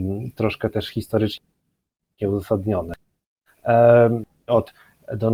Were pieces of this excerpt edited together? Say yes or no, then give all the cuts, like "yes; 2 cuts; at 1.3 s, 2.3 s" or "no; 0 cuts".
no; 0 cuts